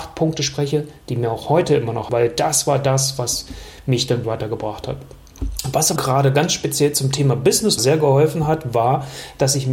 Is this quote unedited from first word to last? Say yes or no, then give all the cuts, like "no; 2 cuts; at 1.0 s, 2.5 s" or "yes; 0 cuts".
no; 4 cuts; at 2.1 s, 4.2 s, 6.0 s, 7.8 s